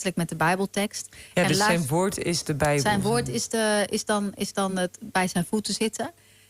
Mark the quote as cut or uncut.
uncut